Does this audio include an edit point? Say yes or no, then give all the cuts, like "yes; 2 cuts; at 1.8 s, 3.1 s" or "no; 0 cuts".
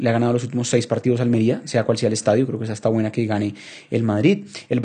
no; 0 cuts